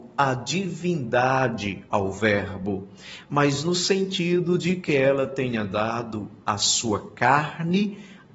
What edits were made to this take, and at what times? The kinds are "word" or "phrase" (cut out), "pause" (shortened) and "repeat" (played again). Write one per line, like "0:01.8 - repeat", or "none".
0:01.9 - pause